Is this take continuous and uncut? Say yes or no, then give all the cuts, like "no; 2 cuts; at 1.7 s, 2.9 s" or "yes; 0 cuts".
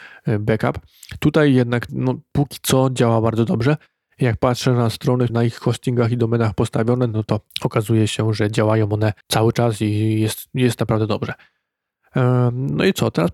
no; 4 cuts; at 1.9 s, 5.3 s, 7.5 s, 9.2 s